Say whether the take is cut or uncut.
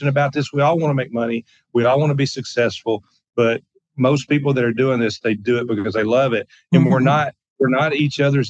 uncut